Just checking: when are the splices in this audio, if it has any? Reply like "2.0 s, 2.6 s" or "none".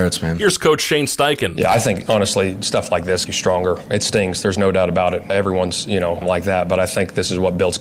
3.3 s, 6.2 s